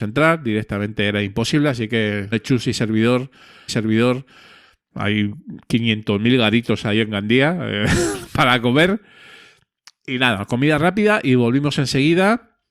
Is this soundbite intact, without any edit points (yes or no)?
no